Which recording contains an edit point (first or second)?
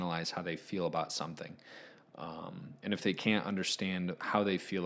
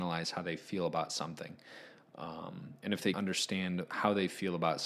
second